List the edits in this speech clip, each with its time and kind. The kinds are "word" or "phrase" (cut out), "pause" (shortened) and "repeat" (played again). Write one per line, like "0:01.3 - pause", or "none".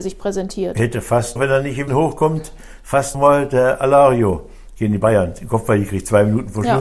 0:01.4 - word
0:01.9 - word
0:03.1 - word